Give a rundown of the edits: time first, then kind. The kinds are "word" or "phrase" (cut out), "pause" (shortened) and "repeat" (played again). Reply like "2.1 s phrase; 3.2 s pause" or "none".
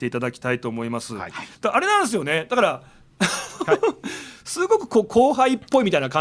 1.5 s pause